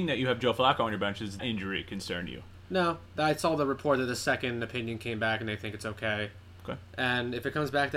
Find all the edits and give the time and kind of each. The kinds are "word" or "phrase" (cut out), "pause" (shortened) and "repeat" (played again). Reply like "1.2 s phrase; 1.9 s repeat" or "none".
1.4 s word